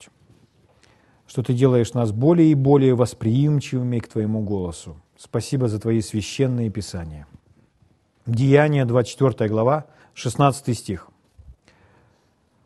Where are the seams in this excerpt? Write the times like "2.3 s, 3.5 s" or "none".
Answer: 5.1 s

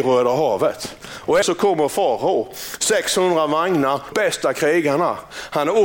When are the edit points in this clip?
1.4 s, 4.1 s

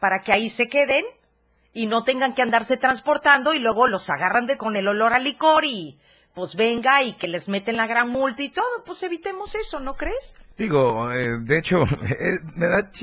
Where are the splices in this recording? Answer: 4.6 s

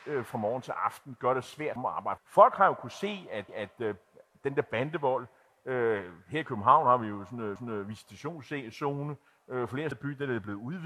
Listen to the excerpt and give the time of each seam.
1.8 s, 2.2 s, 3.5 s, 7.6 s, 9.9 s

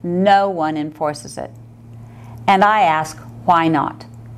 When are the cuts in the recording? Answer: none

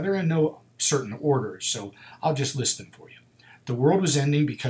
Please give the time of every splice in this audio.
none

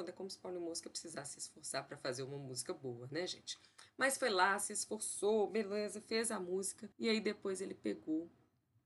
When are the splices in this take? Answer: 6.9 s

